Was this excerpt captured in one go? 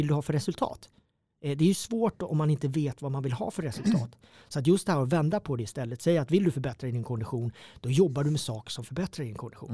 yes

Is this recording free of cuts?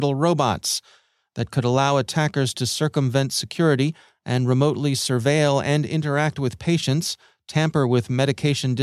yes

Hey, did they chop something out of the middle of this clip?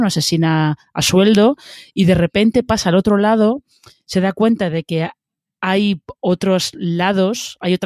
no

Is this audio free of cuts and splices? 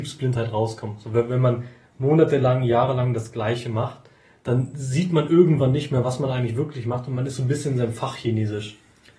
yes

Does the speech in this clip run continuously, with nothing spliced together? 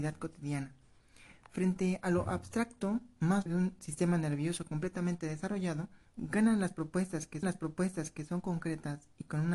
no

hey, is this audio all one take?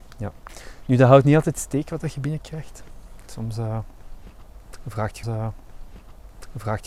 no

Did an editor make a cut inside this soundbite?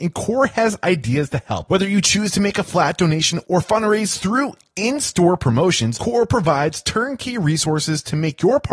no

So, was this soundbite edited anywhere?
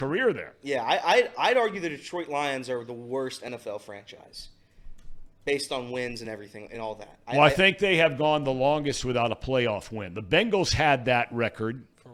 no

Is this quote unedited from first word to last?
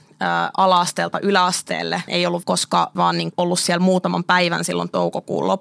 no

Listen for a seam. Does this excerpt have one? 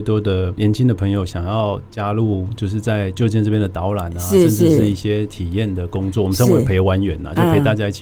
no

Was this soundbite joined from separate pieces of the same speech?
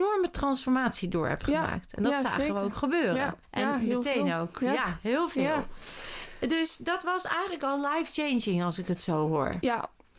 yes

